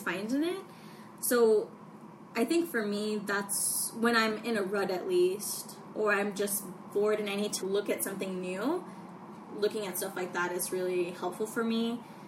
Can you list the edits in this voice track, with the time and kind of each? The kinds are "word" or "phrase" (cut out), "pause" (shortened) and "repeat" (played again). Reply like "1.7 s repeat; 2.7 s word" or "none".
7.6 s word